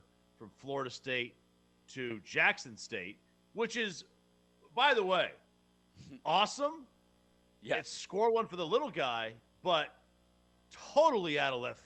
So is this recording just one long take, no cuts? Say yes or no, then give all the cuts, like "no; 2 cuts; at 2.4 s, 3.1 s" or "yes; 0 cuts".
yes; 0 cuts